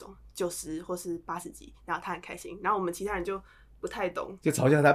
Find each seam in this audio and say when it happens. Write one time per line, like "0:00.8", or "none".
none